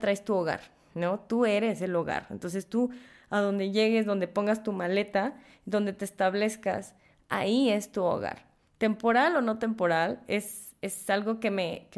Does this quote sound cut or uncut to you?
uncut